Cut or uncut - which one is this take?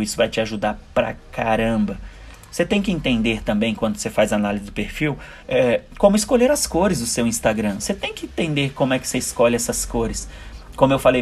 cut